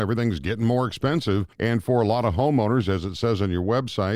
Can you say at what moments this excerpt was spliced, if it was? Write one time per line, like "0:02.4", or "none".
0:01.5